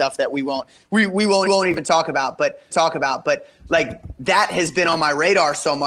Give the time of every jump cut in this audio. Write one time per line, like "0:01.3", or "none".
0:01.5
0:02.7